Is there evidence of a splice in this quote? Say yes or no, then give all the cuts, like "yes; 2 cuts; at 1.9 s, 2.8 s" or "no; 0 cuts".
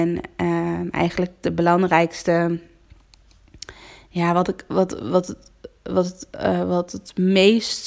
no; 0 cuts